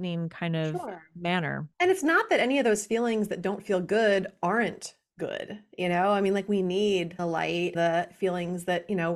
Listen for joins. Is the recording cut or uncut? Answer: cut